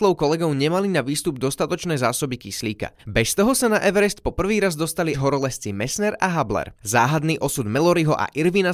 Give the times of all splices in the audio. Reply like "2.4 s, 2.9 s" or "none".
3.0 s, 5.1 s, 6.8 s